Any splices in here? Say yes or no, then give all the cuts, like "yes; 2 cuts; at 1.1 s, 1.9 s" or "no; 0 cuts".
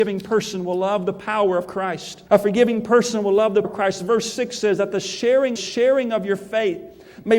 yes; 3 cuts; at 2.3 s, 3.6 s, 5.6 s